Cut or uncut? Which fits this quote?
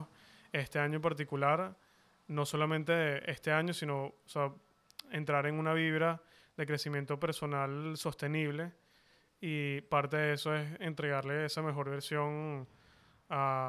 uncut